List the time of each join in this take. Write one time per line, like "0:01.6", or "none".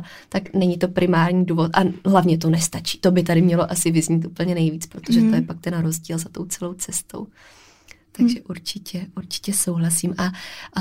none